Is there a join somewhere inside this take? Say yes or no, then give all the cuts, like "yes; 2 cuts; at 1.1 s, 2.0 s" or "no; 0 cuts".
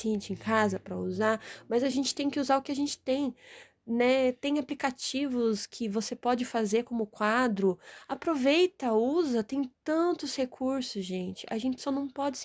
no; 0 cuts